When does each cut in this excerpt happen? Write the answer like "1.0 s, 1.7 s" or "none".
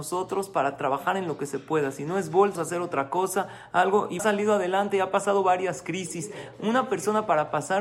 2.6 s, 4.2 s